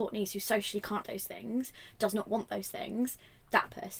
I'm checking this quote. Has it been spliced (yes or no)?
yes